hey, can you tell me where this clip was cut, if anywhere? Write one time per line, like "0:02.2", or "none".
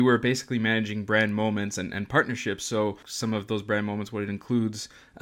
none